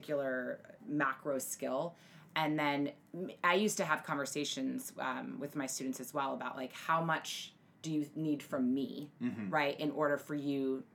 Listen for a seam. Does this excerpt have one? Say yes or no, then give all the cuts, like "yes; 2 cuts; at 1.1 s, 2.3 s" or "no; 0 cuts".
no; 0 cuts